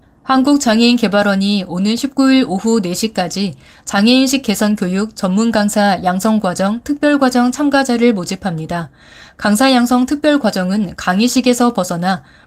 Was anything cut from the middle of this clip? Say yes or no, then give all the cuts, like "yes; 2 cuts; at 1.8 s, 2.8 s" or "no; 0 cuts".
no; 0 cuts